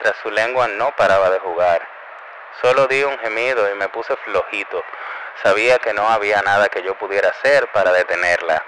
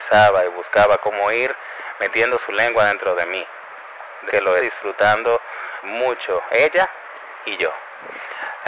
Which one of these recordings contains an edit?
second; 3 cuts; at 4.3 s, 4.6 s, 5.8 s

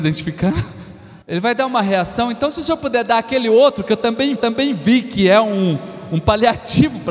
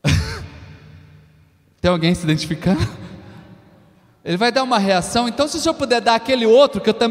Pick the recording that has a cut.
first; 2 cuts; at 1.2 s, 4.4 s

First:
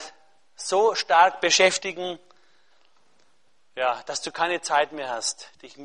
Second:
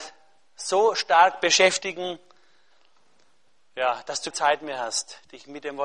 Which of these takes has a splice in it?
second; 1 cut; at 4.3 s

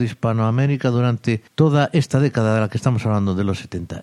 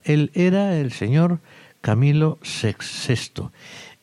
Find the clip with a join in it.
first; 1 cut; at 1.5 s

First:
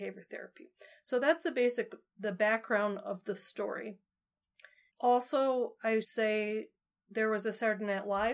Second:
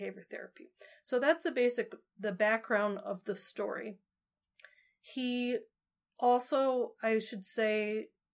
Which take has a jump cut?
first; 2 cuts; at 4.9 s, 6.0 s

